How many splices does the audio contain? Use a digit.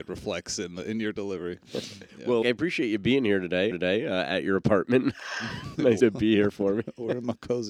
4